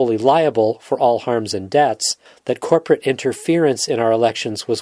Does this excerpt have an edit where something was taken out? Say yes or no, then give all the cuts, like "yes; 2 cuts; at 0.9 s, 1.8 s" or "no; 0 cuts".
yes; 1 cut; at 2.3 s